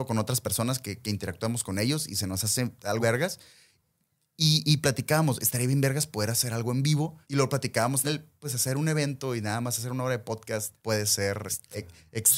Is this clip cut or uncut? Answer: cut